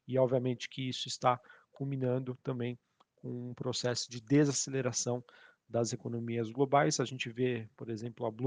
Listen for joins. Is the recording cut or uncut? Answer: uncut